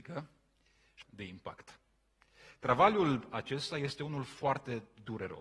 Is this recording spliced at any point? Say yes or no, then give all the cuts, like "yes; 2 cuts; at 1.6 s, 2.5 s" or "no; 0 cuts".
yes; 1 cut; at 1.0 s